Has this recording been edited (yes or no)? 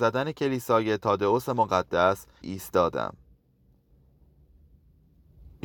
yes